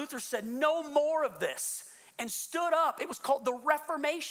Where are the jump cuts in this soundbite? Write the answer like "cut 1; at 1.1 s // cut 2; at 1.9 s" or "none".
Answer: none